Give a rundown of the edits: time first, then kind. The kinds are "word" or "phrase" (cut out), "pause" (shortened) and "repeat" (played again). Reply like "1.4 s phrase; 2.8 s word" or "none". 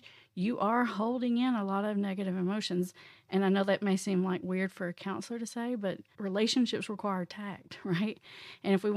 6.1 s pause

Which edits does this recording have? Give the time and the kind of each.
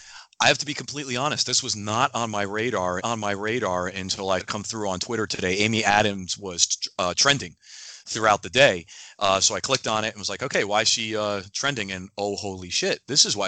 3.0 s repeat; 4.4 s word

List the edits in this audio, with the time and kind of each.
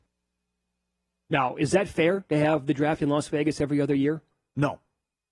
none

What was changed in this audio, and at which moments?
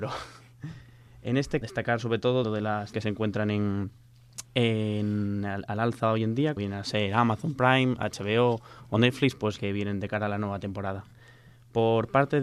1.6 s phrase; 2.4 s word; 2.9 s phrase; 4.5 s pause; 6.6 s word; 9.6 s phrase

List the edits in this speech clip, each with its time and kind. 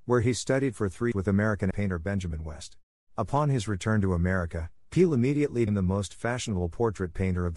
1.1 s word; 1.7 s word; 3.1 s pause; 5.7 s word

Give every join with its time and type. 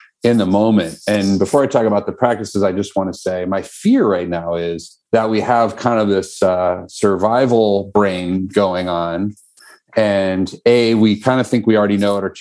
5.1 s pause

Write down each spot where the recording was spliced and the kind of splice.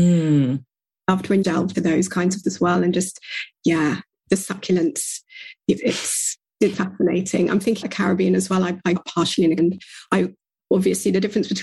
1.4 s word; 1.7 s word; 2.4 s word; 5.8 s word; 6.7 s word; 7.8 s word; 9.0 s word; 9.6 s word

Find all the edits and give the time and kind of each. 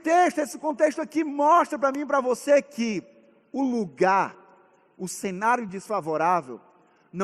none

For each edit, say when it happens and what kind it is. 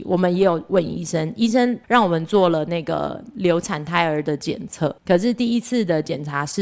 1.8 s pause; 5.0 s pause

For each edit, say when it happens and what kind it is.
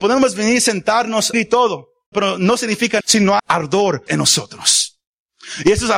1.3 s word; 2.1 s word; 3.0 s word; 3.4 s phrase; 4.1 s phrase

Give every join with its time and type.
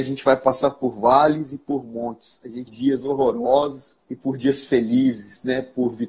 2.7 s phrase; 4.0 s pause

